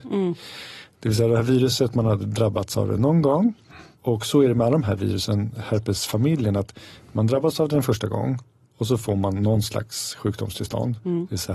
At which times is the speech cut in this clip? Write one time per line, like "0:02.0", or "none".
none